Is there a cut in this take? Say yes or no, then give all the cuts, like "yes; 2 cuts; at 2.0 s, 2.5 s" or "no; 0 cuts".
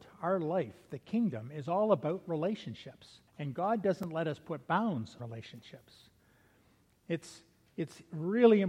yes; 2 cuts; at 3.3 s, 5.2 s